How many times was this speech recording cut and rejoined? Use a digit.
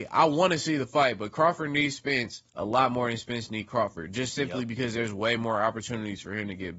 1